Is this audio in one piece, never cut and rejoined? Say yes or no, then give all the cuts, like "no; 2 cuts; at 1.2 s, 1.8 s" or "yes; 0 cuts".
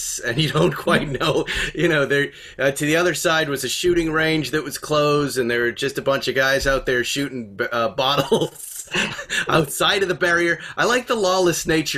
yes; 0 cuts